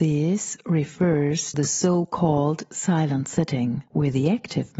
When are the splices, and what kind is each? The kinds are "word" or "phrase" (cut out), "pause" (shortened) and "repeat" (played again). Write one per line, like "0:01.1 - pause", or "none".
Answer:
0:01.5 - word
0:03.9 - pause